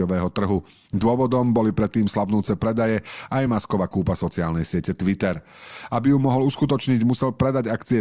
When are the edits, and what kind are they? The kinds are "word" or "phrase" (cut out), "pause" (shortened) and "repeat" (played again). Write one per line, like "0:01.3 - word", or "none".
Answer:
none